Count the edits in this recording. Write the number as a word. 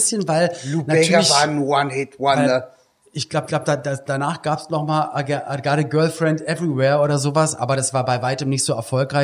one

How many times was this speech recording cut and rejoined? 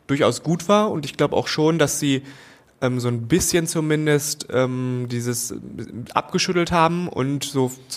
zero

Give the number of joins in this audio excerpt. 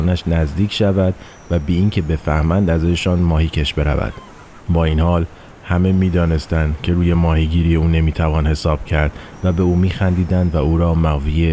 zero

